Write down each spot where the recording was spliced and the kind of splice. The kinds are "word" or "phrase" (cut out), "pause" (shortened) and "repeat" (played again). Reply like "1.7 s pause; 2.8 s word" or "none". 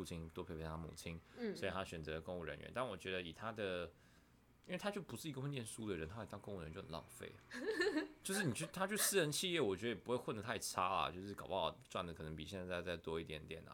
none